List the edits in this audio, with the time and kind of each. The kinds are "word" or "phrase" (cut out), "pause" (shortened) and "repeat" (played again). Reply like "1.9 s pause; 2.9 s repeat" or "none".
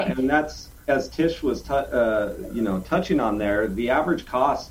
none